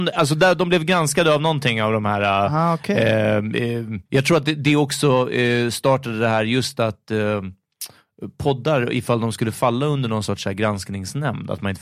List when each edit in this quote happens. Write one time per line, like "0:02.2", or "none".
0:04.1